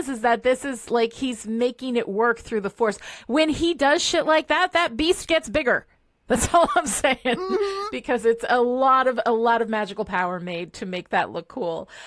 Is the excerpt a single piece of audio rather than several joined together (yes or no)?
yes